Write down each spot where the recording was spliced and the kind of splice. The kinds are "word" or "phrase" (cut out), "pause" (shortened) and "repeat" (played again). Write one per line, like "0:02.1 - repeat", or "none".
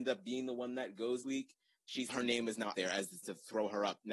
0:01.2 - word
0:02.1 - word
0:02.7 - word
0:03.2 - word